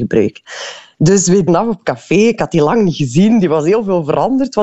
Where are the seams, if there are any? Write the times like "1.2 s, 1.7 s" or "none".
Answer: 1.5 s